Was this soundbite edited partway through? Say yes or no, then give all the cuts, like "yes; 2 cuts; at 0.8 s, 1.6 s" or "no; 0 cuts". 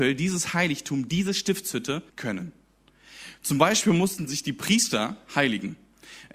yes; 1 cut; at 2.1 s